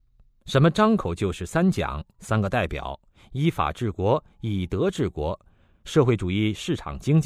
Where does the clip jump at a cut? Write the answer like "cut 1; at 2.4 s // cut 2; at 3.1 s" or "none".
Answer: none